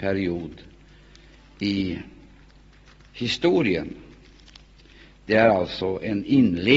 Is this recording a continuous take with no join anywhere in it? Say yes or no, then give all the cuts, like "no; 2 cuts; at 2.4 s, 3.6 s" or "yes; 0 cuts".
yes; 0 cuts